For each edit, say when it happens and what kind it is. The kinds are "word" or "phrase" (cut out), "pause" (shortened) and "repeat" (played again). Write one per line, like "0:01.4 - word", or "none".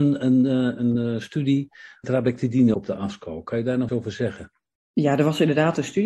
0:02.0 - word
0:02.7 - word
0:03.9 - word